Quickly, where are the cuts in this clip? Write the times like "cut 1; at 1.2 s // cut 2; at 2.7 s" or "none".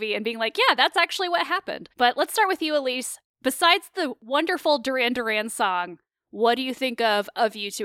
cut 1; at 1.9 s // cut 2; at 3.2 s